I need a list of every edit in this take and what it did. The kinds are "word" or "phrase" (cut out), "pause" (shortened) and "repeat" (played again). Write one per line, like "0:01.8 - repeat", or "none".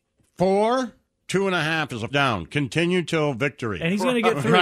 0:01.2 - word
0:02.1 - word